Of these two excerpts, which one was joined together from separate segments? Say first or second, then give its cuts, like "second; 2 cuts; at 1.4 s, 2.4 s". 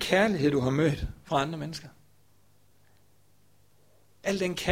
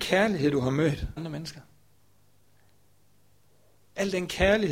second; 1 cut; at 1.2 s